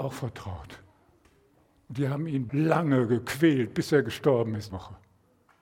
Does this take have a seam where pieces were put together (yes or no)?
yes